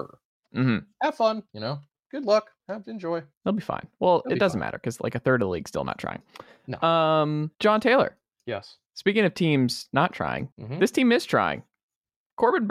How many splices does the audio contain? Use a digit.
7